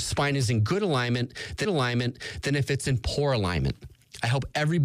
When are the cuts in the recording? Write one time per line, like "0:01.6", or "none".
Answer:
0:01.6